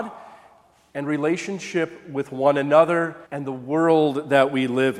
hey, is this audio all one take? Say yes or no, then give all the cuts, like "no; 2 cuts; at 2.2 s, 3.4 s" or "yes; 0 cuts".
no; 1 cut; at 3.3 s